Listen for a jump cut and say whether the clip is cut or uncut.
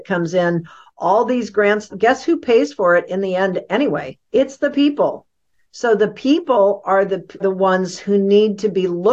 cut